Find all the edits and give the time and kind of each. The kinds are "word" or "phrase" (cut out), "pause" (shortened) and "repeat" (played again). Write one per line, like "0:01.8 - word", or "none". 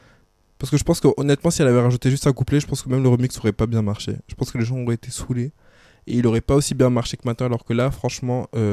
none